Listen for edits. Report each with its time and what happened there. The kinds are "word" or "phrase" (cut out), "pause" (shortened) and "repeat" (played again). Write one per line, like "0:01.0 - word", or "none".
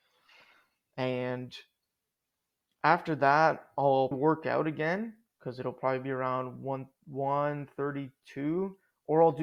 0:04.1 - word